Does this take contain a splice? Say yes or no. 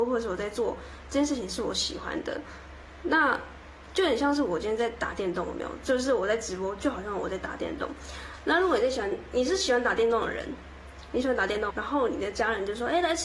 yes